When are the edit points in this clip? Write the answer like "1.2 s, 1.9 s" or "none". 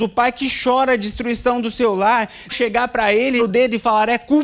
2.5 s, 3.4 s